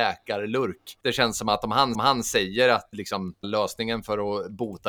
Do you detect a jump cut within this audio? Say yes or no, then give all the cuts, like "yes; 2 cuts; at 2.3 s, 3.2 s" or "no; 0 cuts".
yes; 4 cuts; at 1.0 s, 1.9 s, 2.9 s, 3.4 s